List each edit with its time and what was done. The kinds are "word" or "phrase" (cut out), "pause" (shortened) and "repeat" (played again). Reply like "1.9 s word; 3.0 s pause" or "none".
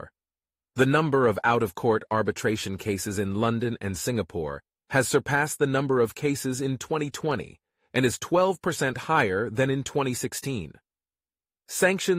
none